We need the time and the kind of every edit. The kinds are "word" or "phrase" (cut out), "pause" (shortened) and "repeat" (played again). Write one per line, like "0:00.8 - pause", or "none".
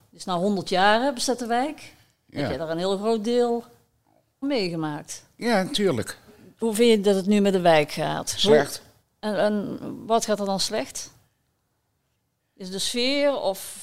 0:04.4 - word